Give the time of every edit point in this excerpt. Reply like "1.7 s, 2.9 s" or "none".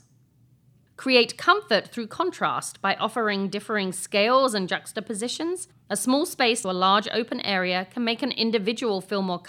6.6 s